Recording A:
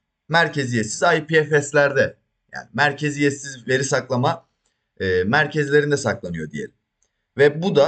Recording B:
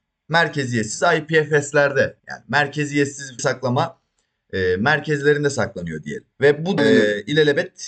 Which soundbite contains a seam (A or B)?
B